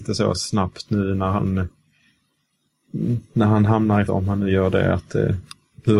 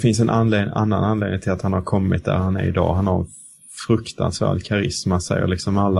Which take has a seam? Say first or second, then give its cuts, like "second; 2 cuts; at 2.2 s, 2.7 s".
first; 1 cut; at 4.1 s